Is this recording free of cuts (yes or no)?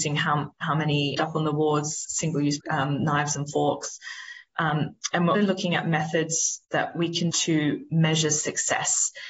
no